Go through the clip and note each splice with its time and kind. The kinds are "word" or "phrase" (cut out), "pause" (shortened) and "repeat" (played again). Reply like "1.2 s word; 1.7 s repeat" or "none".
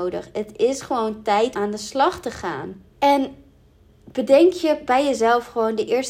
1.5 s word; 2.9 s pause